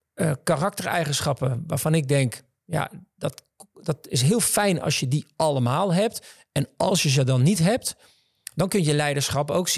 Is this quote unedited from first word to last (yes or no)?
yes